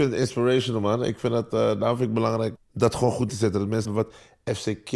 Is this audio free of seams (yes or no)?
no